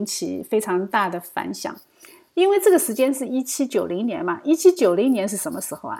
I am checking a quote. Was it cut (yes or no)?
no